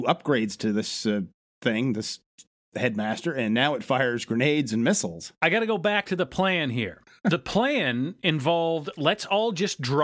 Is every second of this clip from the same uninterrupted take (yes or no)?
yes